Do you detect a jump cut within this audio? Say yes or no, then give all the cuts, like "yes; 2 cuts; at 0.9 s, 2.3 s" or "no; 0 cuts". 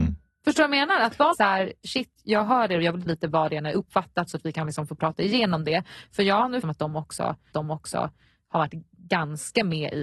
yes; 4 cuts; at 1.3 s, 3.1 s, 6.6 s, 7.5 s